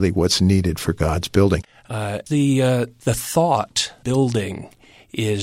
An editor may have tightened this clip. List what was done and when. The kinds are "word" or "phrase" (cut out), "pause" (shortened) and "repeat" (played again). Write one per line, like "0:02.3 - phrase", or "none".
0:02.3 - word
0:04.0 - word